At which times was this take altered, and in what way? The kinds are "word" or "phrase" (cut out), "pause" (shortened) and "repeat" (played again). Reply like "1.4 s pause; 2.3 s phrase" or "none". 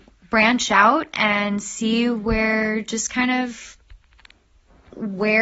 none